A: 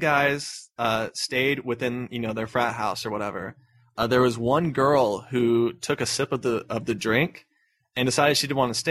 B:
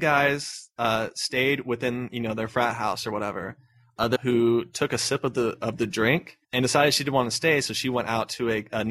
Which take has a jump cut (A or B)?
B